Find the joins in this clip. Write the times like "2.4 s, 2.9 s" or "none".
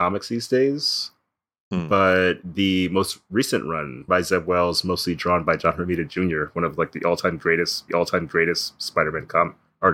4.1 s, 7.9 s